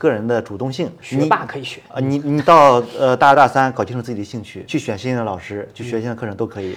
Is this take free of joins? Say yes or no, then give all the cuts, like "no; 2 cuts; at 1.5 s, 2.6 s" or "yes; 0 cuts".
no; 2 cuts; at 1.0 s, 4.7 s